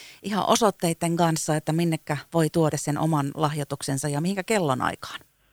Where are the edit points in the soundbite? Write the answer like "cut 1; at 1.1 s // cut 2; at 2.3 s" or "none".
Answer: cut 1; at 2.7 s